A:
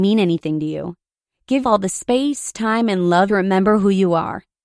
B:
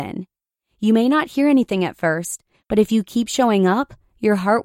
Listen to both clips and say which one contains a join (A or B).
A